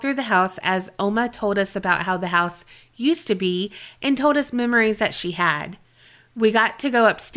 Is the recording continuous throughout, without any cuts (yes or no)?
yes